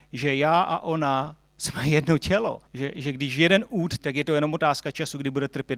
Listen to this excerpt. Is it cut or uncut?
cut